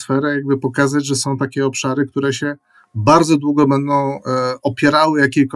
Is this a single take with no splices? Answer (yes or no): yes